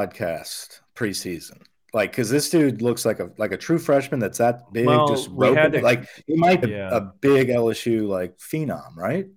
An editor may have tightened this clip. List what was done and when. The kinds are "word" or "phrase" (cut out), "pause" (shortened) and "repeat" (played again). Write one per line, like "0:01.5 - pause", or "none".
0:06.6 - word